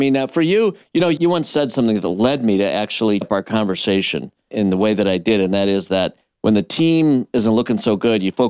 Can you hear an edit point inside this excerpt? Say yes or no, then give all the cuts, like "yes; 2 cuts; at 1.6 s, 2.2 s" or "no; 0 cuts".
yes; 1 cut; at 3.2 s